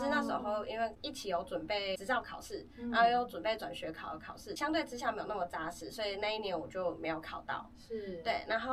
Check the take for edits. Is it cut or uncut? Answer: uncut